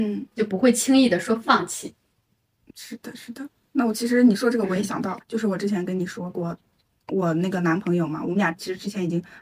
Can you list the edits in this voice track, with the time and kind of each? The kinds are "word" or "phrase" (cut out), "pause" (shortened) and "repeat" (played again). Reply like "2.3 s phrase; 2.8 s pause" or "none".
5.2 s word